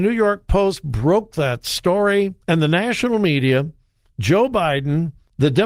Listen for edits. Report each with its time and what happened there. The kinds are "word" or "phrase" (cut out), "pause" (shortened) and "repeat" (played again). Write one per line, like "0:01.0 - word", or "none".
0:02.4 - pause